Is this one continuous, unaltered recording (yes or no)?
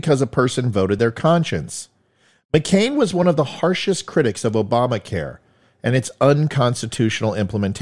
yes